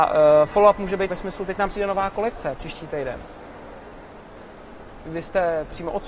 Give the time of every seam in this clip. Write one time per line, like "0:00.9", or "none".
0:01.1